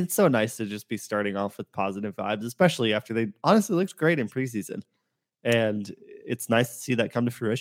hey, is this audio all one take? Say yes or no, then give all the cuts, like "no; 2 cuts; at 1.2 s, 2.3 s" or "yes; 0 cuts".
yes; 0 cuts